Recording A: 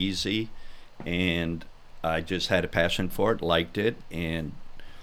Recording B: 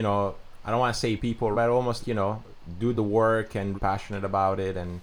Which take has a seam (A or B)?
B